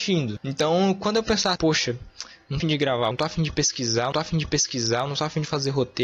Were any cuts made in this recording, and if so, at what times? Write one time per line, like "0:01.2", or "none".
0:01.6
0:02.6
0:03.1
0:04.1

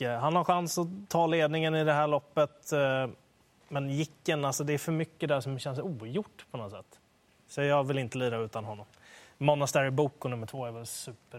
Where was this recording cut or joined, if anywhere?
none

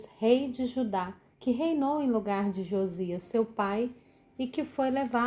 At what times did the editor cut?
0:01.3

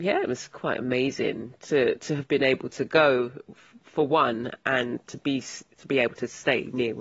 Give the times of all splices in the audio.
none

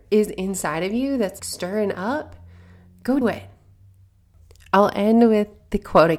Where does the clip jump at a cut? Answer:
0:01.4
0:03.2

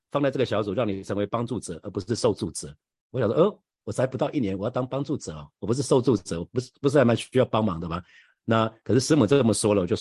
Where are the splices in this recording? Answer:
none

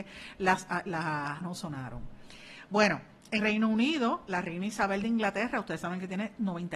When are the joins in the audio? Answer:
0:01.4
0:03.4

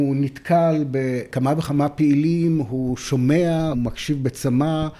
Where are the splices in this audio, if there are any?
0:03.7

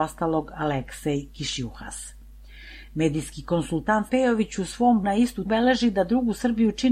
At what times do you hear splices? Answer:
0:04.1
0:05.0
0:05.5

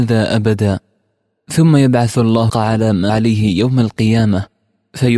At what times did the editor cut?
0:02.5
0:03.1

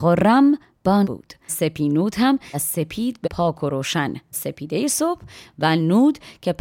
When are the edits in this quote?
0:01.0
0:01.5
0:02.5
0:03.2
0:04.3

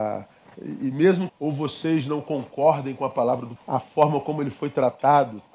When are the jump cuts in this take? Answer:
0:01.3
0:03.6

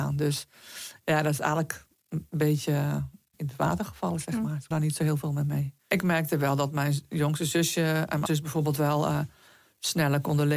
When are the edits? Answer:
0:03.3
0:04.7
0:05.8
0:08.3

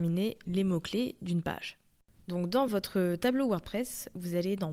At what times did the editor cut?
none

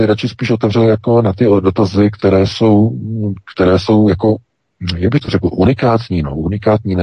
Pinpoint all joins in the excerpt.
none

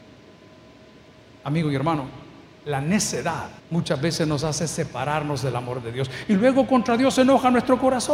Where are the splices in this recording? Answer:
0:03.6

